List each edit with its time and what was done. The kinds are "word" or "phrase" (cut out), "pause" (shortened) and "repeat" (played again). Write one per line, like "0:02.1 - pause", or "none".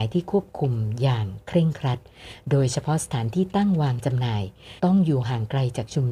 0:04.8 - pause